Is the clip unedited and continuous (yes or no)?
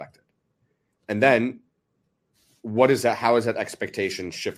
yes